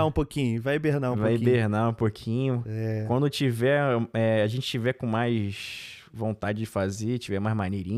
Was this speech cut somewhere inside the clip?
no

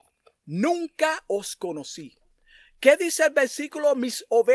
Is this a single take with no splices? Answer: yes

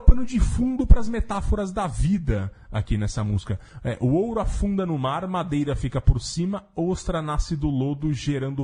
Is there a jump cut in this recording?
no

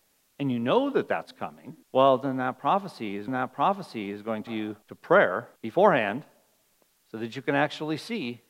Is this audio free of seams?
no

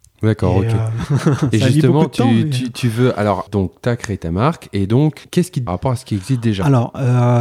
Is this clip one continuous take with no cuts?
no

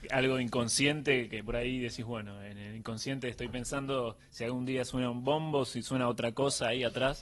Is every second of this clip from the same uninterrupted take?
yes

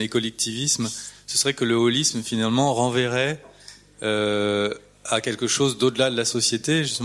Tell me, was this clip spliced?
no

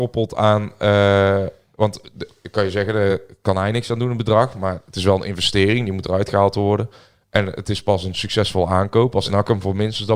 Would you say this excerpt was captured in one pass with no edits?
yes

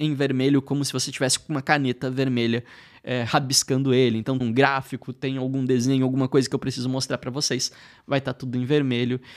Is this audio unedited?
no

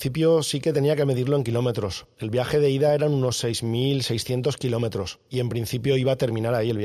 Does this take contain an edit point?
no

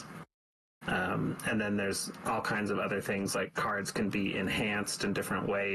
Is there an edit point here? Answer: no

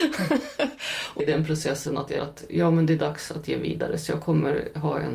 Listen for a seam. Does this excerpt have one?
yes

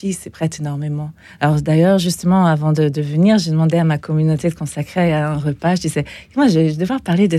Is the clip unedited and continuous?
yes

